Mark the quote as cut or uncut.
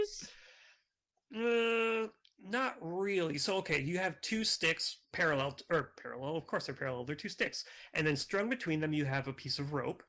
cut